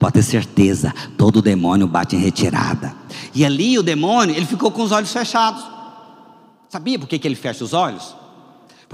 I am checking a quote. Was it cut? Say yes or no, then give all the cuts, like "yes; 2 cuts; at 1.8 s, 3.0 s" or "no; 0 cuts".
no; 0 cuts